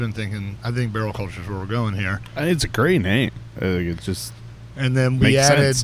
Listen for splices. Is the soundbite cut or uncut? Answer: uncut